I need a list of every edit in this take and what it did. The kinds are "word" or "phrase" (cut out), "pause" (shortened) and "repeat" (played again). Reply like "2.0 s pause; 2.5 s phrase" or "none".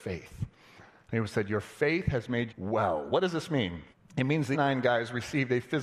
2.5 s word; 3.9 s pause; 4.5 s word